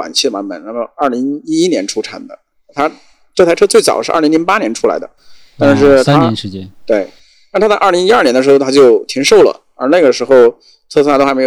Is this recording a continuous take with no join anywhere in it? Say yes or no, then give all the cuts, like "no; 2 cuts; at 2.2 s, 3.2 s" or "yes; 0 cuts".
yes; 0 cuts